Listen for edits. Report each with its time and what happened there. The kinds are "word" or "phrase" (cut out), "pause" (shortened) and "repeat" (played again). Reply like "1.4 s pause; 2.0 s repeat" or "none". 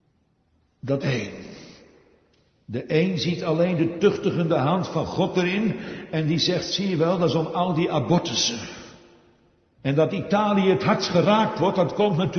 1.0 s phrase